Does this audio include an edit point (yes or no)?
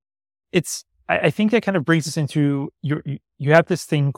no